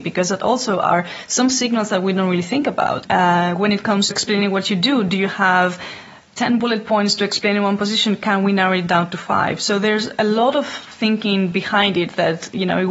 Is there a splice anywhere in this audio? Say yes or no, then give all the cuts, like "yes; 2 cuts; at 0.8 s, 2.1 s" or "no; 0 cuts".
yes; 1 cut; at 4.1 s